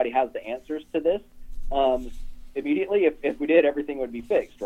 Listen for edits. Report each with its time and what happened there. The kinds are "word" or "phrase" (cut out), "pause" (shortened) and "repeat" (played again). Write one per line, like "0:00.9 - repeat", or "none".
none